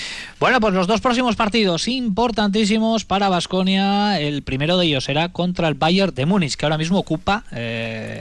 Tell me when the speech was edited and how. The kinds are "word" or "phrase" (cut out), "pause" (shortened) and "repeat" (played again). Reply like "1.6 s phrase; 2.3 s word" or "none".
none